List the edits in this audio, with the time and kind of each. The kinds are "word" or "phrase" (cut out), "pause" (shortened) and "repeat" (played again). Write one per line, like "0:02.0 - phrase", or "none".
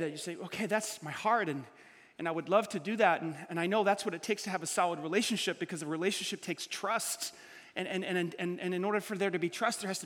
none

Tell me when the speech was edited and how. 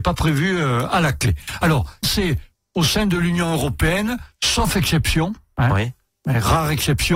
0:02.0 - word

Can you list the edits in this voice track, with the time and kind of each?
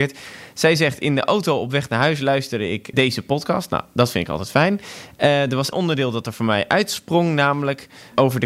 0:02.9 - word
0:05.7 - word

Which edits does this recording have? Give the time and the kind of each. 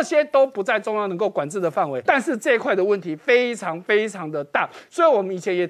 0:02.1 - word

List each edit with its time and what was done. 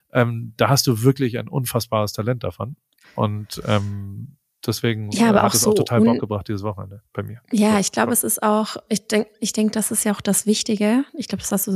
none

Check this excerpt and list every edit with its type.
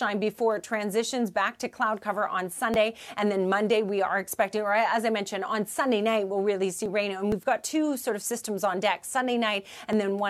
none

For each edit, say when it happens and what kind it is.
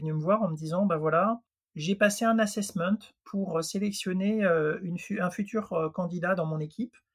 none

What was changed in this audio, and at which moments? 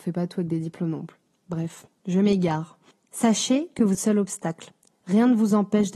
0:03.9 - phrase

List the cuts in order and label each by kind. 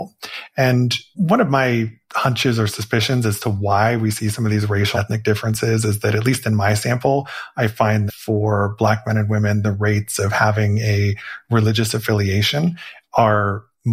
0:04.9 - word
0:08.1 - word

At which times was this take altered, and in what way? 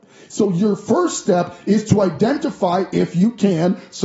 none

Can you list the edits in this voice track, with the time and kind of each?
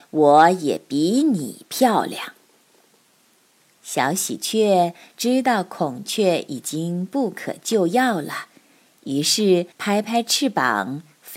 0:09.7 - pause

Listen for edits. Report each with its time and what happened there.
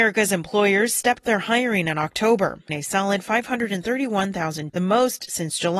0:01.2 - word
0:02.7 - word
0:04.7 - word

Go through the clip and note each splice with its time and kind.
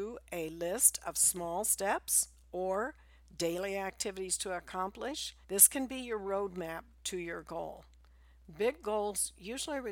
0:05.4 - pause

